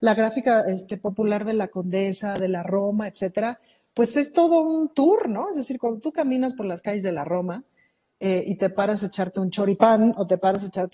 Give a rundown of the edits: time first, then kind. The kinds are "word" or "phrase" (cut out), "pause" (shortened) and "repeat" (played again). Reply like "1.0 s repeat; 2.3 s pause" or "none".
none